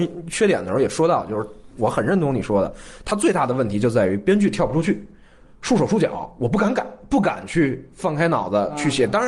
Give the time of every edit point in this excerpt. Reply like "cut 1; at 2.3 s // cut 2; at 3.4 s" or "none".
none